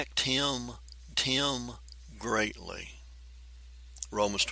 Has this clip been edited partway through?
yes; 1 cut; at 1.1 s

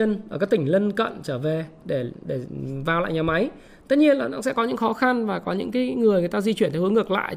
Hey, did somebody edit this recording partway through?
no; 0 cuts

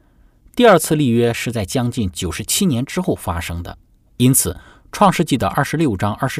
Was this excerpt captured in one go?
yes; 0 cuts

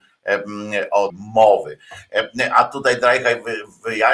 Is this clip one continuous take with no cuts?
no; 1 cut; at 1.1 s

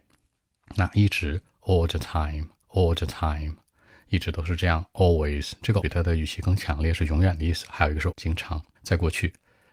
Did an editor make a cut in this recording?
yes; 4 cuts; at 2.6 s, 5.8 s, 8.1 s, 8.7 s

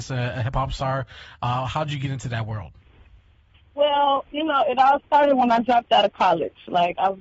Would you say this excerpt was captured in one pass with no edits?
yes; 0 cuts

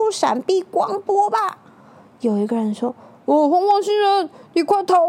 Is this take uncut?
yes; 0 cuts

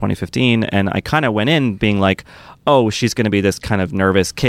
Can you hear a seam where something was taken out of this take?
no; 0 cuts

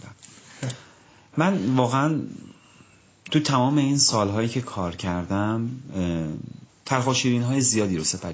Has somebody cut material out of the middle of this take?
yes; 1 cut; at 6.7 s

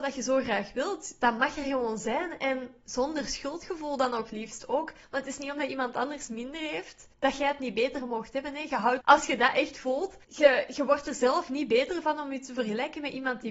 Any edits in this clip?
yes; 3 cuts; at 7.1 s, 9.0 s, 10.2 s

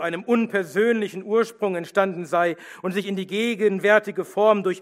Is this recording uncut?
yes; 0 cuts

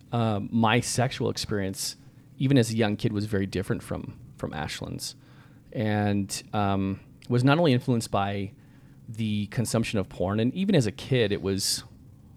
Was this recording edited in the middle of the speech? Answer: no; 0 cuts

